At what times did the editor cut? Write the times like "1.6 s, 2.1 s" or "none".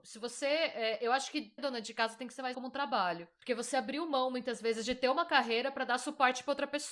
1.6 s, 2.5 s